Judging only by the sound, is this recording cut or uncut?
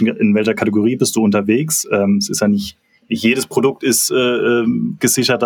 uncut